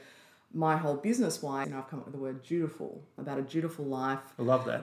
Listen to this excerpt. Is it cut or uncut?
cut